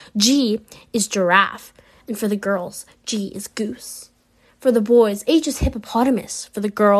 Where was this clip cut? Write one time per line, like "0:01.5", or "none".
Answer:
none

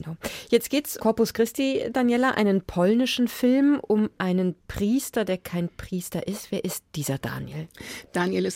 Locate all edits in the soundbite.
0:01.0

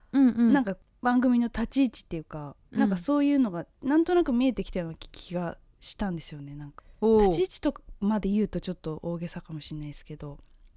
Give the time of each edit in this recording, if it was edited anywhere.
0:02.6

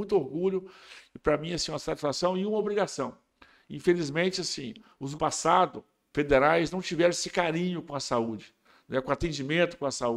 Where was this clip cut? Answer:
0:05.2

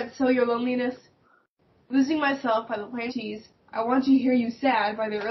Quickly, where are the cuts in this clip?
0:03.1

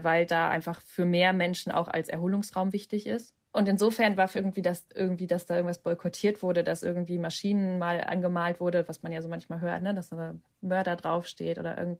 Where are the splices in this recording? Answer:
0:04.3
0:04.9

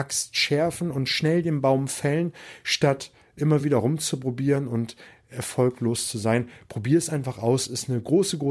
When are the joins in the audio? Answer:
none

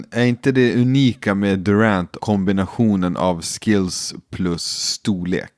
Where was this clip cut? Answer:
0:02.2

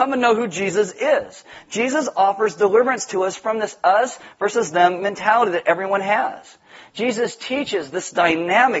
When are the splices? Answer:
none

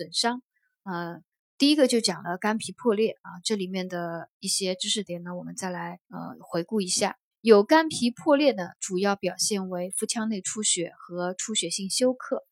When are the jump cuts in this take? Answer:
0:01.4
0:04.3
0:06.0
0:07.3

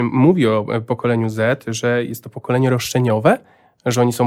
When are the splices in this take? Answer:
none

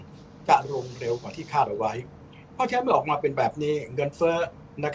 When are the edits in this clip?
none

